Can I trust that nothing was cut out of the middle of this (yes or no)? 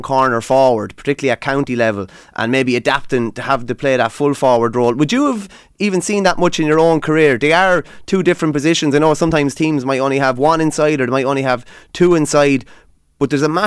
yes